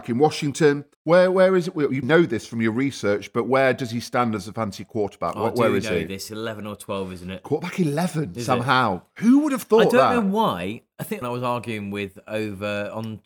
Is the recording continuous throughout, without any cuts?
no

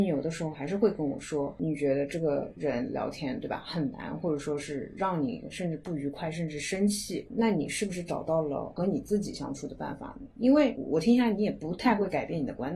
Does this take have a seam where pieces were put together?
no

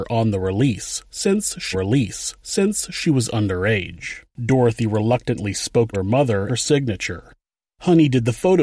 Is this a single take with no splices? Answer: no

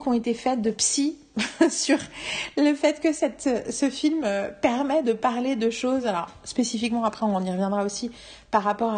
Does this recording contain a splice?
no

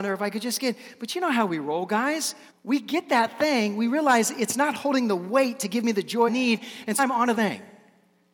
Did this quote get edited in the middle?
yes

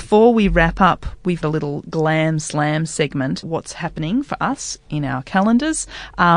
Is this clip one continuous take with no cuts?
no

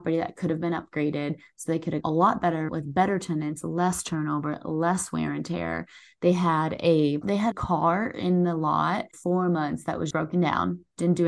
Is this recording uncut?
no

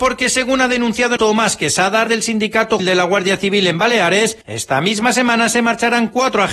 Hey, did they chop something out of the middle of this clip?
yes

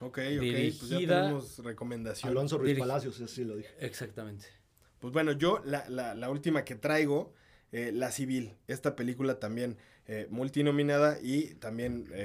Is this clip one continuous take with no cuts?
yes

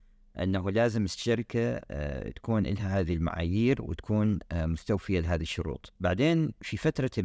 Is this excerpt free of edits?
no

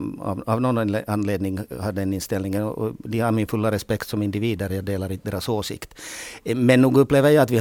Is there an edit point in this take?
no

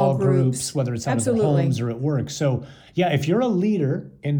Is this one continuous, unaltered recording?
yes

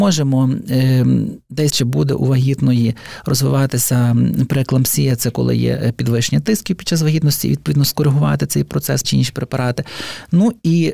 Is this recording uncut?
no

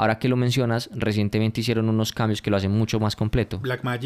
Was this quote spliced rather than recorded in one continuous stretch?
no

